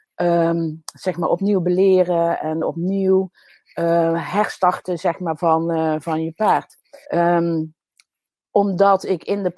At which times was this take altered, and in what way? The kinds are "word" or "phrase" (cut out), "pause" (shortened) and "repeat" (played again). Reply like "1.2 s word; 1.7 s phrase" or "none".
7.0 s pause